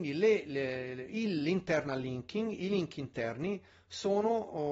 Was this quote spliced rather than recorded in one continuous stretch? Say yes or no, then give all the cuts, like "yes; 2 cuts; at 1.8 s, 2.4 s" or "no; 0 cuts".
no; 0 cuts